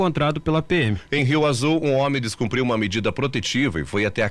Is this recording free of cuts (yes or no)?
yes